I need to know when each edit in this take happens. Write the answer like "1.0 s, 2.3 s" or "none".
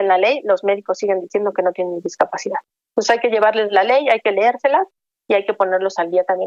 none